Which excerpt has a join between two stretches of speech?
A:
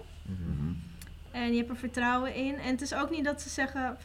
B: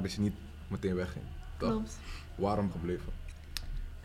B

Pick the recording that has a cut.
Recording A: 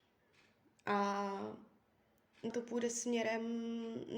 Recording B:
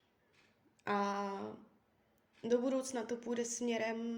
A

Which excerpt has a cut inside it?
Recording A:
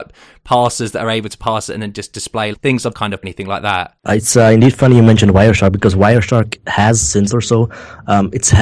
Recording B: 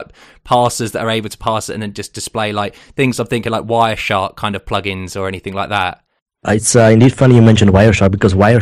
A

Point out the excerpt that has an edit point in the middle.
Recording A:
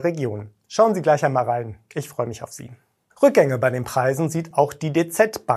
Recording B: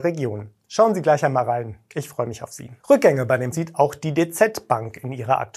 B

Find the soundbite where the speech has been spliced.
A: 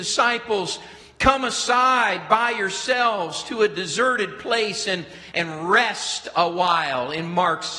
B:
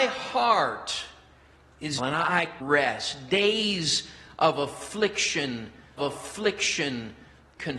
B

